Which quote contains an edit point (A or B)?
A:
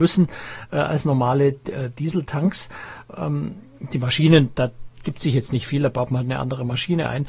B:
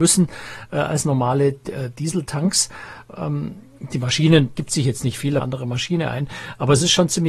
B